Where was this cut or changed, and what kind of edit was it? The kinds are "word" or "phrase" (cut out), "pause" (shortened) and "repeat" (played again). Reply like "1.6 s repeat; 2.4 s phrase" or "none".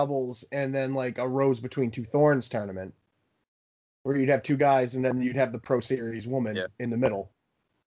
none